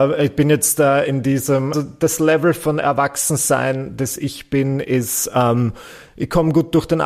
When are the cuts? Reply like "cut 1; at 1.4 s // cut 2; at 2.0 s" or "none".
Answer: cut 1; at 1.7 s